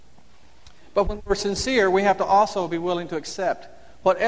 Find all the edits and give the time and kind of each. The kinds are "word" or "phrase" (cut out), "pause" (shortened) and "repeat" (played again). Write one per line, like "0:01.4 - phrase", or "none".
none

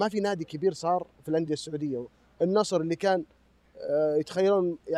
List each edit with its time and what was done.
none

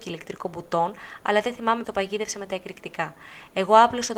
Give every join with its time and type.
0:01.8 - word

